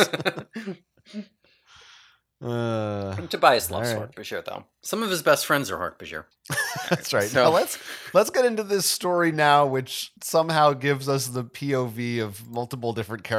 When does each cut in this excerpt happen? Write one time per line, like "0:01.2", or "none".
0:06.3
0:10.2